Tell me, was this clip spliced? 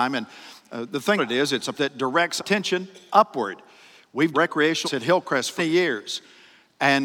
yes; 7 cuts; at 1.2 s, 1.7 s, 2.4 s, 3.1 s, 4.3 s, 4.8 s, 5.6 s

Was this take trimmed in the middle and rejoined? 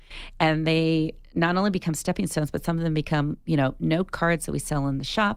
no; 0 cuts

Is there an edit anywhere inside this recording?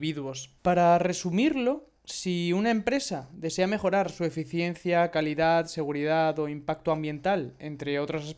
yes; 1 cut; at 2.0 s

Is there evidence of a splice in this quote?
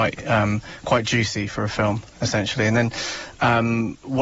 no; 0 cuts

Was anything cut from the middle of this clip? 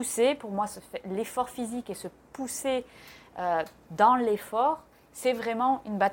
no; 0 cuts

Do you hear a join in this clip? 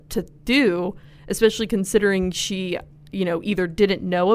no; 0 cuts

